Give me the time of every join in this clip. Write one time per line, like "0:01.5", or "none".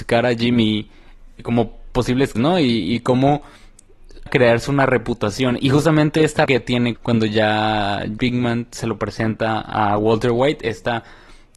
0:01.4
0:02.4
0:04.3
0:06.5
0:07.0
0:08.2